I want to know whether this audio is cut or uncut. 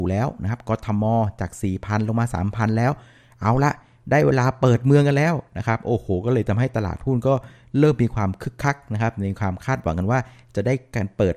uncut